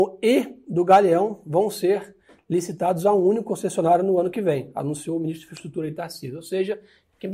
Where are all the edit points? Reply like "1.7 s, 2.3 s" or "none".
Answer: none